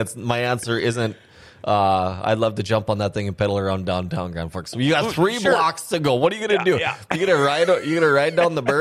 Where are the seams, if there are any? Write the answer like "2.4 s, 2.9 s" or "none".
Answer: none